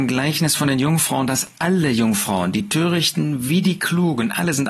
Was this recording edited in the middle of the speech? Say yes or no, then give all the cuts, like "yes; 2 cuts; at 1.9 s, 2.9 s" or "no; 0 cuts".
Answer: no; 0 cuts